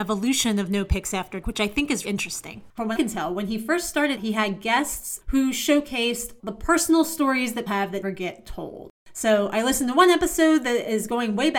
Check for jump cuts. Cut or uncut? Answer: cut